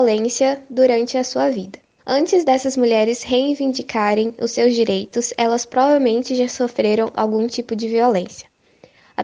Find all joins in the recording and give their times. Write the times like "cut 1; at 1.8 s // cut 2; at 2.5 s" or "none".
cut 1; at 2.0 s

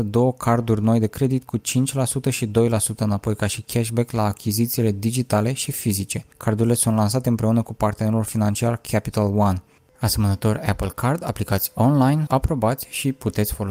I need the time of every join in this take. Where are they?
cut 1; at 12.3 s

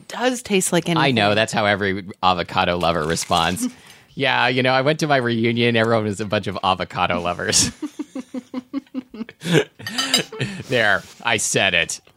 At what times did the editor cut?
cut 1; at 11.1 s

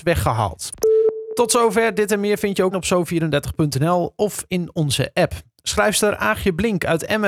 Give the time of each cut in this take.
cut 1; at 2.7 s

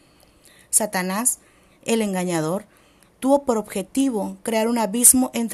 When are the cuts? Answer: none

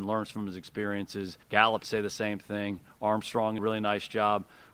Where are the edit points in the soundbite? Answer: cut 1; at 1.4 s // cut 2; at 1.8 s // cut 3; at 3.6 s

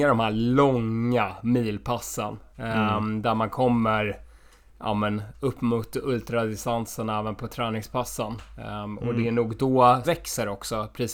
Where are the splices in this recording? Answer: cut 1; at 10.0 s

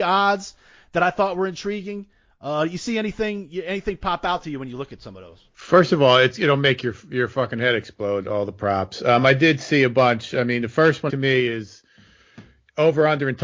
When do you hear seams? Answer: cut 1; at 5.5 s // cut 2; at 11.1 s

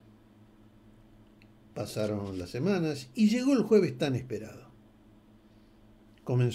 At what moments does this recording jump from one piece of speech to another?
none

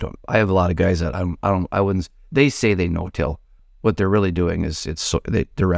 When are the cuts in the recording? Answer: none

